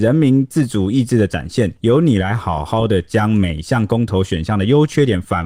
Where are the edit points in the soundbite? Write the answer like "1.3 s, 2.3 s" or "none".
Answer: 1.8 s